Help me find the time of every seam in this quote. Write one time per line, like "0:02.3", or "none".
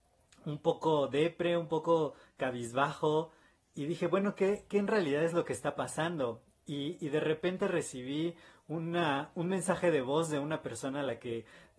none